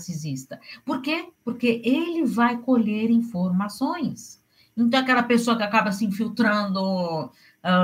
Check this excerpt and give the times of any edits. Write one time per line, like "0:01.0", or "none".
0:01.4